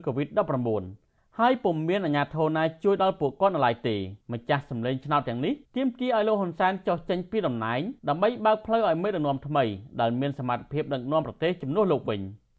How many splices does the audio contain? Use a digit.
3